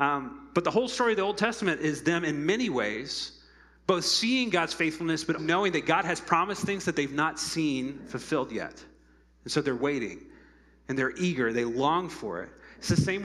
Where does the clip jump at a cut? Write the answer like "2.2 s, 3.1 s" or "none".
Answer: 5.4 s